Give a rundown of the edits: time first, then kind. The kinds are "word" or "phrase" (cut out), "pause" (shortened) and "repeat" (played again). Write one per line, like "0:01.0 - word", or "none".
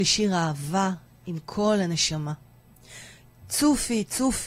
none